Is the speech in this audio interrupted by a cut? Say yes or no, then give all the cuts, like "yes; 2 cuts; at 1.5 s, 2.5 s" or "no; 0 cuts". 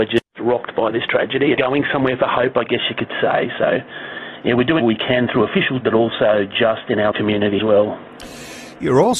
yes; 5 cuts; at 1.5 s, 4.8 s, 5.8 s, 7.1 s, 7.6 s